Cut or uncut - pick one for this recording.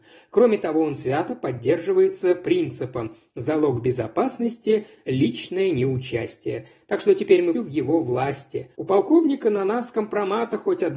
cut